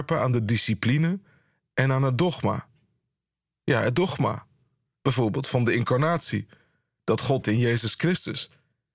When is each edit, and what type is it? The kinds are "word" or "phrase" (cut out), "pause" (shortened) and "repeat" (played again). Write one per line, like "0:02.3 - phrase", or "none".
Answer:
0:07.4 - phrase